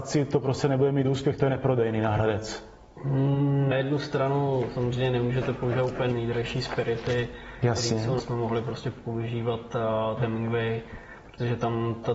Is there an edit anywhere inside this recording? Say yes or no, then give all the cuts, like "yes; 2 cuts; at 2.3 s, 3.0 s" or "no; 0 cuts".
yes; 4 cuts; at 3.7 s, 6.1 s, 8.2 s, 10.2 s